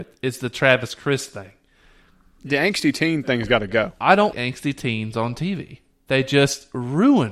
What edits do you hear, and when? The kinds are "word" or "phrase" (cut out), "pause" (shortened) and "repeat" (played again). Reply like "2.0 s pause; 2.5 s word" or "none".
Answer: 4.3 s word